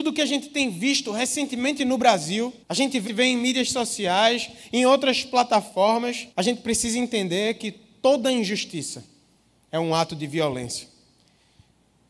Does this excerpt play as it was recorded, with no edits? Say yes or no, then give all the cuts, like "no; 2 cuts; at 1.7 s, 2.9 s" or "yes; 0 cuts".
no; 3 cuts; at 2.6 s, 3.1 s, 6.3 s